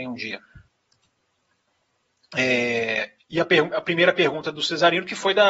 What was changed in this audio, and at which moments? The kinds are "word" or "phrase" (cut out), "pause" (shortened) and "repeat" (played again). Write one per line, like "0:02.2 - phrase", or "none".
none

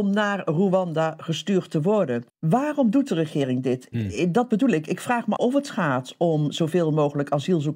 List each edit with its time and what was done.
0:02.3 - pause
0:05.4 - word

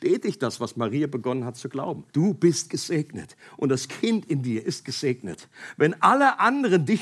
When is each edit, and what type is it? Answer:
0:02.1 - pause

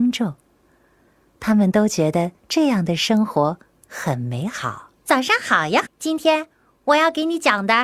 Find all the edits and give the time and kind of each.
0:02.4 - pause
0:04.9 - pause
0:05.9 - phrase

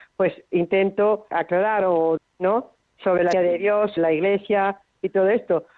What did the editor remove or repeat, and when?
0:01.3 - word
0:02.2 - word
0:03.3 - word
0:04.0 - word

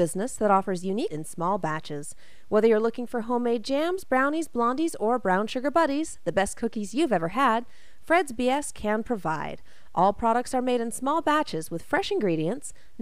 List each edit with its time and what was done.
0:01.1 - word

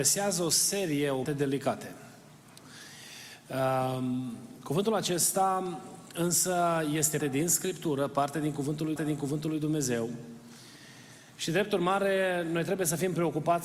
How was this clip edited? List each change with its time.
0:01.2 - phrase
0:07.2 - word
0:09.0 - repeat

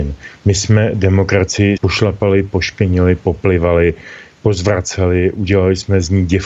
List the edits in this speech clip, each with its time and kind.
0:01.8 - word

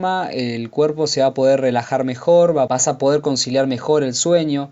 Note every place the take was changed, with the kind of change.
none

